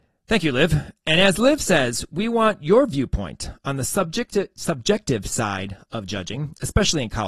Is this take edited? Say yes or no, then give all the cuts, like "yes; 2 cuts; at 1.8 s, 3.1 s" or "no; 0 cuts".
no; 0 cuts